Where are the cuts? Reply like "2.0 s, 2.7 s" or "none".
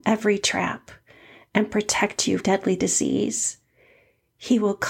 2.4 s